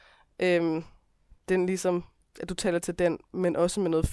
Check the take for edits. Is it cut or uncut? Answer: cut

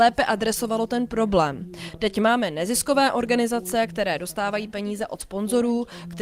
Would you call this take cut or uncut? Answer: uncut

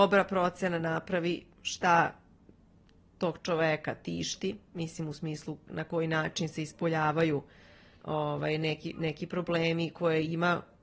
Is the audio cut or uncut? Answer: uncut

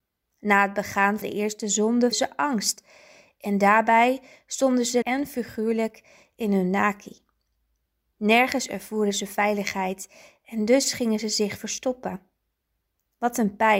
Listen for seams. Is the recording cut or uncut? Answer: cut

